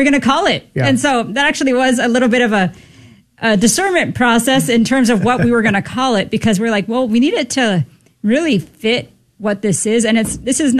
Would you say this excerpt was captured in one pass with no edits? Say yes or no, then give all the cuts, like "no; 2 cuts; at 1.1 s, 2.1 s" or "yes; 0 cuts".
yes; 0 cuts